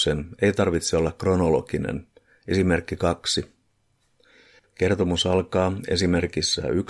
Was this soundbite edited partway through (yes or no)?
no